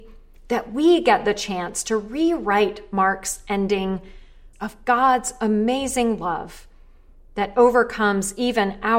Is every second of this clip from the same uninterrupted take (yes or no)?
no